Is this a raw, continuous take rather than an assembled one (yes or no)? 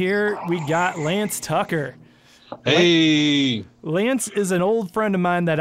yes